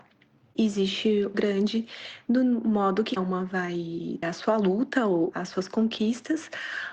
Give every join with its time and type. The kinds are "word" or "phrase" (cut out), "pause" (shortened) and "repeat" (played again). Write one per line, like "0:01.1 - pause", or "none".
0:01.3 - phrase
0:03.2 - word
0:04.2 - word